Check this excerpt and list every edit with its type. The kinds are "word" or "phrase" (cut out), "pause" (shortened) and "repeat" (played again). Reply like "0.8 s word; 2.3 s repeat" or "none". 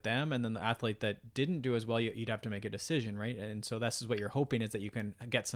none